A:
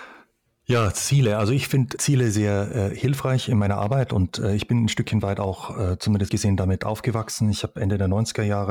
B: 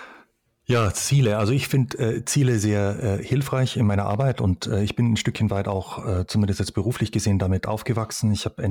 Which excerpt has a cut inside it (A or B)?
A